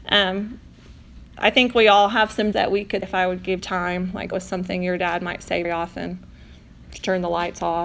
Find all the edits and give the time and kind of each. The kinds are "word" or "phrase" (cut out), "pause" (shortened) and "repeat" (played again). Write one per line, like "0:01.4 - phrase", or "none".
0:02.5 - word
0:03.0 - word
0:03.6 - word
0:04.3 - word
0:05.6 - word